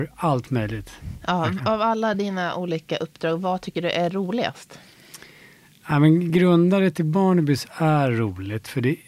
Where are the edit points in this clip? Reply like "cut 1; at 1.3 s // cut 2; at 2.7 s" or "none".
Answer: none